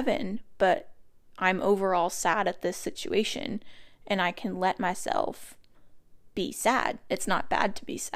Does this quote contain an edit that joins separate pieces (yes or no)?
no